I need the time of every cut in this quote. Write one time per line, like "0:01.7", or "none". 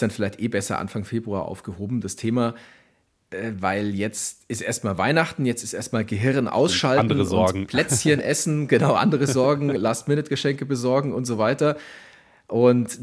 none